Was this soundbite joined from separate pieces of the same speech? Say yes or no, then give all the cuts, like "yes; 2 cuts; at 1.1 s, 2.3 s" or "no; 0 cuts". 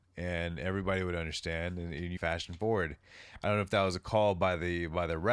yes; 1 cut; at 2.2 s